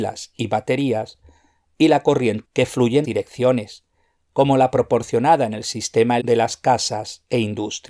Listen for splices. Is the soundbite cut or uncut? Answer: cut